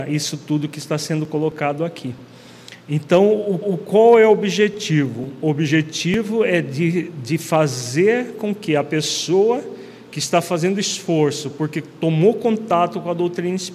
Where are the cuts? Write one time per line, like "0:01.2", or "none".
0:03.6